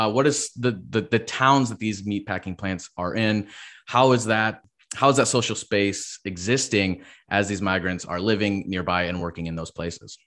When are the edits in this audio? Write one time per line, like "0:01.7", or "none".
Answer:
none